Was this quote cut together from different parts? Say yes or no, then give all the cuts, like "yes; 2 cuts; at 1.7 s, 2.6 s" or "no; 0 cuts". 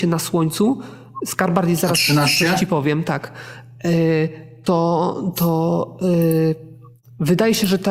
no; 0 cuts